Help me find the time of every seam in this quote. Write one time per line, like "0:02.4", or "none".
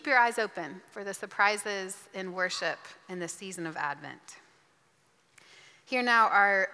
none